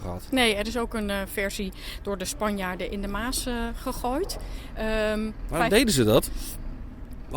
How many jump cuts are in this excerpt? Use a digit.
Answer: 0